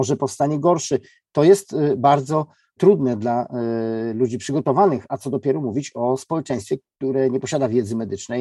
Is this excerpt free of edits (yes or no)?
yes